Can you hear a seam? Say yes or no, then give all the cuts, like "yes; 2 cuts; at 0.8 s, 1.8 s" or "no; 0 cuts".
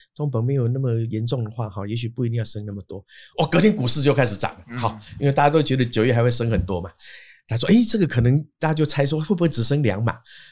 no; 0 cuts